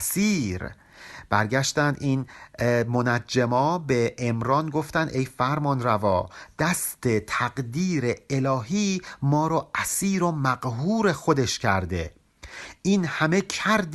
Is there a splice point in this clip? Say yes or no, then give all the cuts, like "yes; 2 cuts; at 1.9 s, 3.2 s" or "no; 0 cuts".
no; 0 cuts